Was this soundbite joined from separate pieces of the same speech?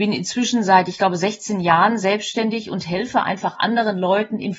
no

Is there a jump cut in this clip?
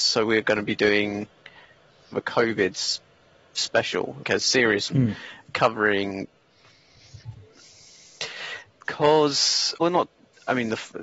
yes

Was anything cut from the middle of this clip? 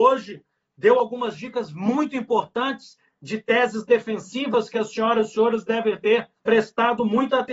yes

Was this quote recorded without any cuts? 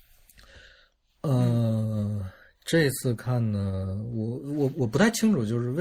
yes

